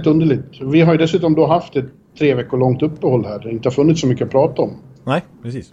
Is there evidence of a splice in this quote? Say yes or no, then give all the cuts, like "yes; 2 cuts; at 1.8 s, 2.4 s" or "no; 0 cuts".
no; 0 cuts